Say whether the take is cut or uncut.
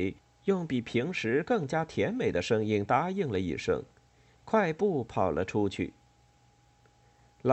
uncut